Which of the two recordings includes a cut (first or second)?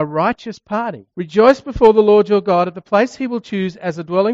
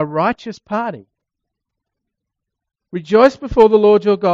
first